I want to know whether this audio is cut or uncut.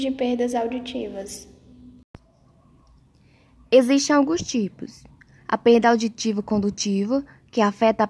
uncut